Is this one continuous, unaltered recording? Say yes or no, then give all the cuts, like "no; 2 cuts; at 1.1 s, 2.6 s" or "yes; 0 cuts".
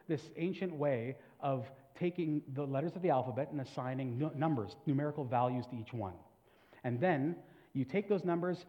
yes; 0 cuts